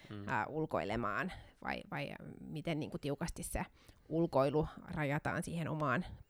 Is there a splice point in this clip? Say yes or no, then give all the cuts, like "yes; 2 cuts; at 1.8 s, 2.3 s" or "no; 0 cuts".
no; 0 cuts